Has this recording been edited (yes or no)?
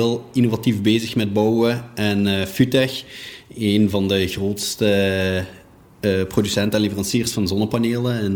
no